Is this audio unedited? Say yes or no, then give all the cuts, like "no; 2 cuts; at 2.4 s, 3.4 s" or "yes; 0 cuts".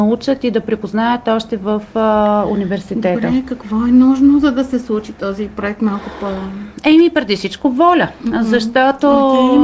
yes; 0 cuts